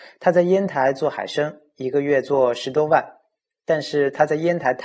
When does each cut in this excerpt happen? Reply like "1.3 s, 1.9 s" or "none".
none